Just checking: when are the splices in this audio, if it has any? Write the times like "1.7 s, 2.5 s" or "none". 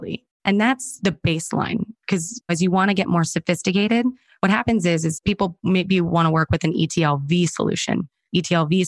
none